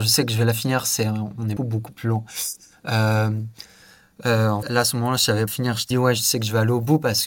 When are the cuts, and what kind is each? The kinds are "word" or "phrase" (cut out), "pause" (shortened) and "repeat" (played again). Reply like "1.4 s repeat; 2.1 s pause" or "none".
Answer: 1.6 s word; 4.6 s word; 5.5 s phrase; 5.9 s word